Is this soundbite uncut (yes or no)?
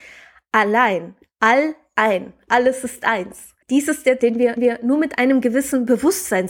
no